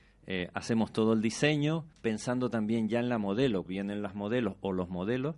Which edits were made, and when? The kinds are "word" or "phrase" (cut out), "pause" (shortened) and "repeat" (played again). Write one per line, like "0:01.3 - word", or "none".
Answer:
0:01.9 - pause
0:03.7 - word

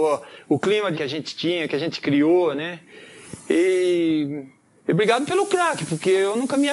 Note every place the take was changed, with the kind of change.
0:00.9 - word

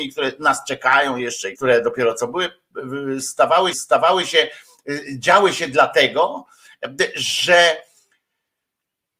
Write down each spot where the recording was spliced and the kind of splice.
0:01.6 - word
0:03.7 - repeat

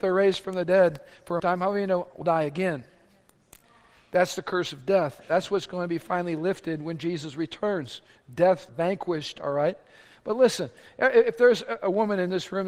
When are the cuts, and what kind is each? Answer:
0:01.4 - phrase
0:02.2 - word
0:08.7 - word

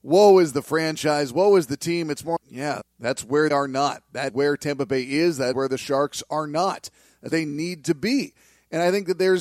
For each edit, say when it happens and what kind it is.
0:02.4 - word
0:02.8 - word
0:03.5 - word
0:04.3 - word
0:05.5 - word
0:07.3 - word

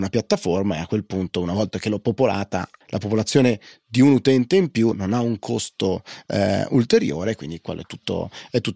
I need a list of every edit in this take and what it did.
none

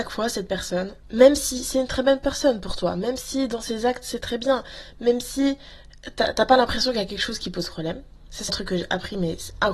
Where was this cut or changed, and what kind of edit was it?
0:08.5 - word

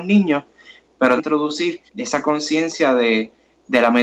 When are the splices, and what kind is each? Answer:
0:01.2 - phrase
0:01.9 - pause

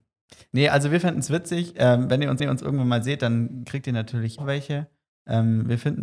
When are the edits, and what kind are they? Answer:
0:02.4 - repeat
0:04.4 - word

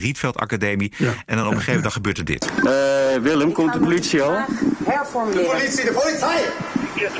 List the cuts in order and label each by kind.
none

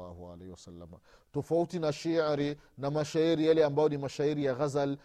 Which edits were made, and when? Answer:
none

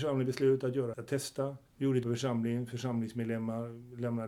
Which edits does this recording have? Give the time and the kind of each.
0:00.9 - word
0:01.7 - pause
0:02.0 - word

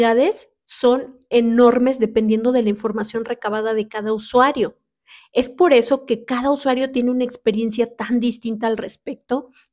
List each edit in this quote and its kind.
none

